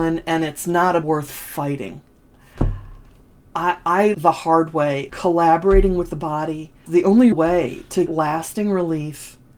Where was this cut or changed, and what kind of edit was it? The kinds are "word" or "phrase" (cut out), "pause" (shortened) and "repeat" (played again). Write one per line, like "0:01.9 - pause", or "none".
0:01.0 - word
0:04.1 - word
0:05.1 - word
0:06.9 - word
0:07.3 - word
0:08.1 - word